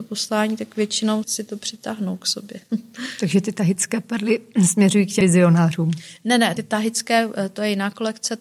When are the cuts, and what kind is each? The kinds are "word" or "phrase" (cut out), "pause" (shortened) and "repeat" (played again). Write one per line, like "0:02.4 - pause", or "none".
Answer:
0:01.2 - word
0:05.2 - word
0:06.6 - word